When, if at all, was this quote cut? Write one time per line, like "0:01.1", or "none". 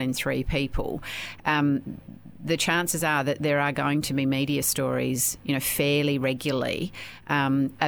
none